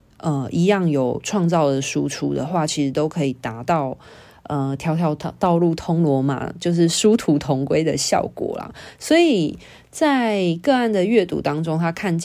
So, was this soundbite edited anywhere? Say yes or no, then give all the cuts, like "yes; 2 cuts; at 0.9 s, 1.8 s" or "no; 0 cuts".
no; 0 cuts